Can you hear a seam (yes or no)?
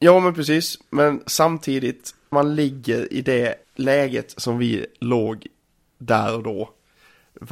yes